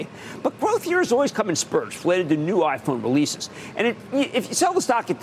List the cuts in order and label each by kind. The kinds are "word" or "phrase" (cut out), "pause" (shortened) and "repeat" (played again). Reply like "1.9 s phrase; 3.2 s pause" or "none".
none